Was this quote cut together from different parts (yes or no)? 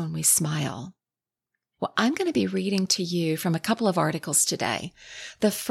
no